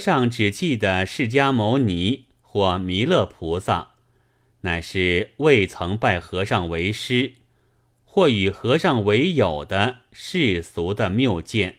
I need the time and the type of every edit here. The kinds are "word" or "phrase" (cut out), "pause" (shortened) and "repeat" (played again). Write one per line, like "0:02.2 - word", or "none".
none